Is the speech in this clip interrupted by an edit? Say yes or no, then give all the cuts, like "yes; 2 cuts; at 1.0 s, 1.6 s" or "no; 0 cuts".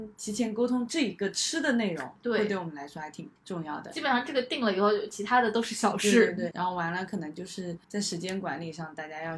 yes; 3 cuts; at 3.4 s, 6.5 s, 7.8 s